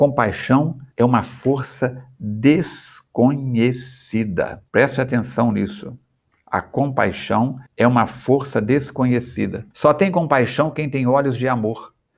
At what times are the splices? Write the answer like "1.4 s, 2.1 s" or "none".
0.9 s, 4.7 s, 7.7 s, 9.7 s

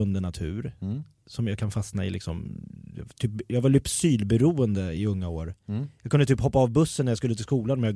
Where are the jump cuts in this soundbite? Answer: 3.1 s

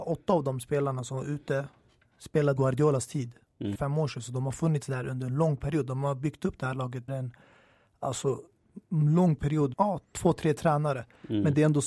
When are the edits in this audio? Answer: 2.6 s, 3.7 s, 7.1 s, 9.7 s

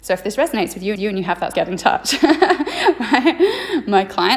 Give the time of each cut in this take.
1.0 s, 1.5 s

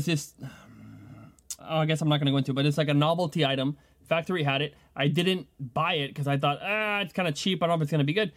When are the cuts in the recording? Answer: 1.6 s, 5.5 s

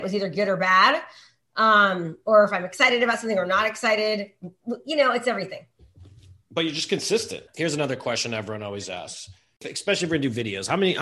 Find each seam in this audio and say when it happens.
none

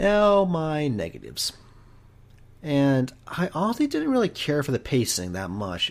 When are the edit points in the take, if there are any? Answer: none

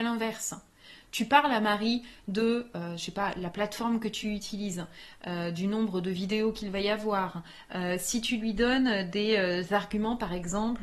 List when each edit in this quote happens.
none

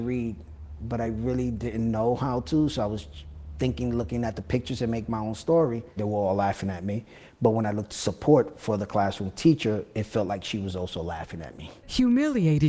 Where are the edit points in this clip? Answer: none

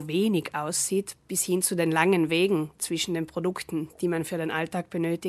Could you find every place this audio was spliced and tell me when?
none

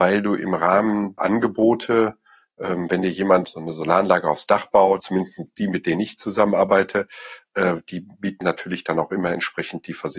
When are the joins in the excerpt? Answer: 1.2 s, 3.4 s, 5.0 s, 8.4 s

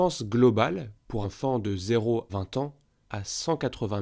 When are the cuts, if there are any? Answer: 1.2 s, 2.3 s, 3.0 s

